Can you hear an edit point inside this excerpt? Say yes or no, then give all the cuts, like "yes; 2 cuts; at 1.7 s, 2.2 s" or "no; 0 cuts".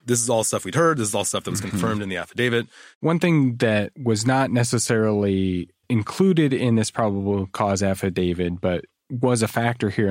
no; 0 cuts